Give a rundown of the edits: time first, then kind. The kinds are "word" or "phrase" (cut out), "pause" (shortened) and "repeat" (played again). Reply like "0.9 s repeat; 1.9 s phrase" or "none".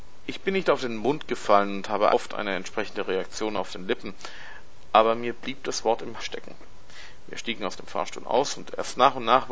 2.1 s word; 6.2 s word